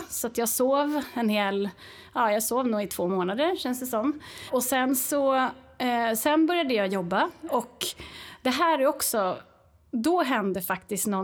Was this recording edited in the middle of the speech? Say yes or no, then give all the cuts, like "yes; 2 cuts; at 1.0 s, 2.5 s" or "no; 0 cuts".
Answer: no; 0 cuts